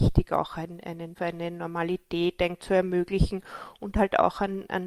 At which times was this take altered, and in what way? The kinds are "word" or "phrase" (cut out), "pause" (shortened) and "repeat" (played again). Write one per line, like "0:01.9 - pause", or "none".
0:01.2 - word
0:02.6 - word

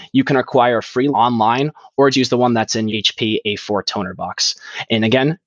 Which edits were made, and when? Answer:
0:01.1 - word
0:02.1 - word
0:02.9 - word

